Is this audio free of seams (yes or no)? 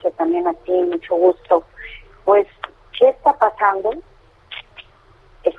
yes